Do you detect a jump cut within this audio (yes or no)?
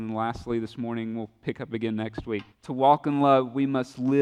yes